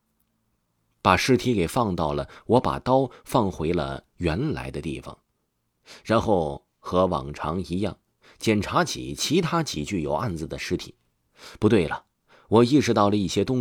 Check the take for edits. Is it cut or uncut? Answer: uncut